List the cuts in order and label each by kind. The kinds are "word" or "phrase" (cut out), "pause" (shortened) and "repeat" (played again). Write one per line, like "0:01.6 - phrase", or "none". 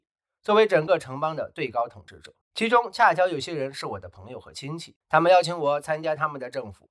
0:02.4 - pause
0:05.0 - pause